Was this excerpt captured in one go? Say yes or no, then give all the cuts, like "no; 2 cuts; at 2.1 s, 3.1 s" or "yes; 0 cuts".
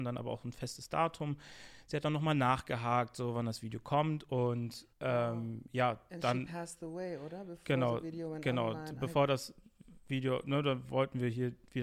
no; 1 cut; at 4.9 s